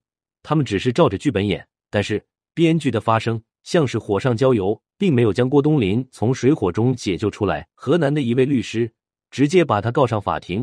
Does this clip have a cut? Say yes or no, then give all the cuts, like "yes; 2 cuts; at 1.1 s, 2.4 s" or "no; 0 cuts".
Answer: yes; 3 cuts; at 1.8 s, 4.9 s, 7.7 s